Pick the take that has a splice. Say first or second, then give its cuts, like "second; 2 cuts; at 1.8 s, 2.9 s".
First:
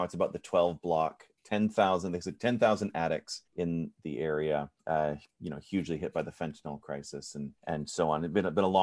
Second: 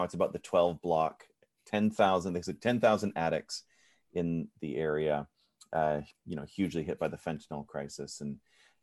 first; 4 cuts; at 1.4 s, 3.5 s, 4.8 s, 7.6 s